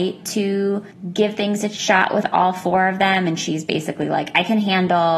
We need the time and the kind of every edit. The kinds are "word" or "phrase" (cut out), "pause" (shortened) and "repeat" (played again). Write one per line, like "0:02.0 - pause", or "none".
none